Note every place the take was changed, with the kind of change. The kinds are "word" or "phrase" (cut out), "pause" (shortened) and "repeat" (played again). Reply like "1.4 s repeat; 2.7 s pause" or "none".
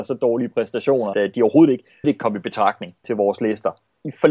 1.1 s word; 2.0 s word; 3.0 s word